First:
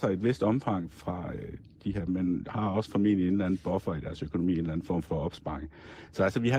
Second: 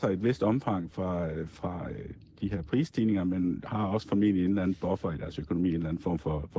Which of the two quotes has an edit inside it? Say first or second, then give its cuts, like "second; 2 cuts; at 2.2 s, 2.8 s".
first; 3 cuts; at 0.9 s, 2.1 s, 5.0 s